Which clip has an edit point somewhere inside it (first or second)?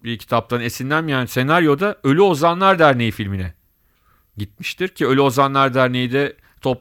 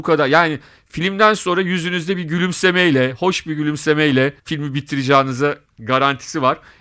second